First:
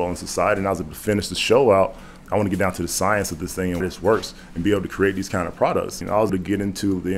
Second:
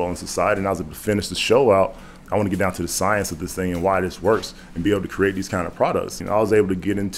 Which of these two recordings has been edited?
first; 2 cuts; at 3.8 s, 6.3 s

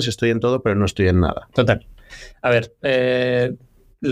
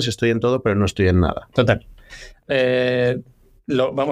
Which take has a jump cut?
second; 1 cut; at 2.4 s

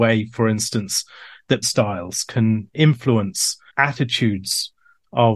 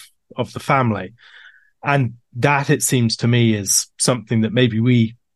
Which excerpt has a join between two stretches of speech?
first; 2 cuts; at 1.6 s, 3.7 s

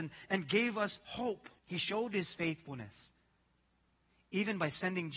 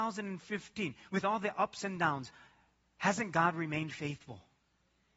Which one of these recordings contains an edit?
first; 1 cut; at 1.6 s

